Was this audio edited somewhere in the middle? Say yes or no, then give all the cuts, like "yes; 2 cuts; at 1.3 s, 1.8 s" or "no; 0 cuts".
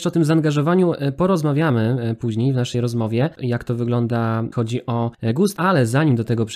yes; 3 cuts; at 3.4 s, 4.5 s, 5.6 s